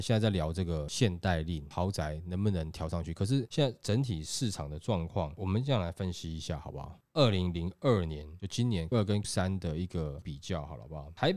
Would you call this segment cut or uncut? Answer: cut